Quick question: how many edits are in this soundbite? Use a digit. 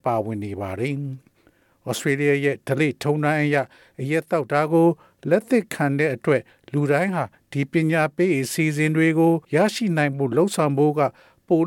1